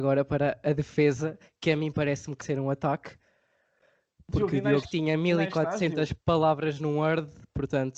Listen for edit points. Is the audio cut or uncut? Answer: cut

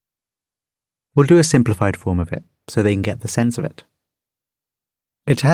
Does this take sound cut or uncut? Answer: uncut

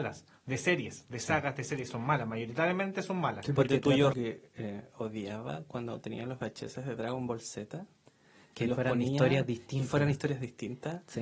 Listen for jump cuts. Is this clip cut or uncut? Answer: cut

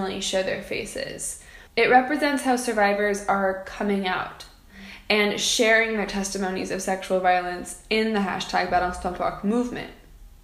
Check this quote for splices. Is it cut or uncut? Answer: cut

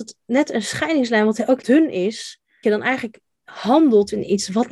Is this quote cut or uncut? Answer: cut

